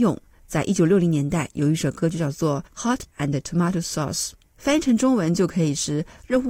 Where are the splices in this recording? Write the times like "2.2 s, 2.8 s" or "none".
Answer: 2.7 s, 3.1 s